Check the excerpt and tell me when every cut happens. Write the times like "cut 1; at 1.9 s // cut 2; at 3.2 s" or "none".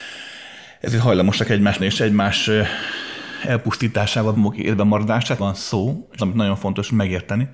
cut 1; at 1.8 s // cut 2; at 4.3 s // cut 3; at 5.4 s // cut 4; at 6.2 s